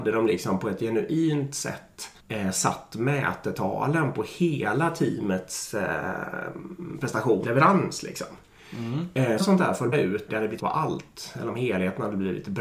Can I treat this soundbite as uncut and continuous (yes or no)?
no